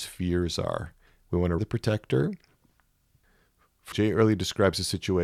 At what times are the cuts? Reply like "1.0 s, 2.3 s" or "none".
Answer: 1.1 s, 1.6 s, 3.9 s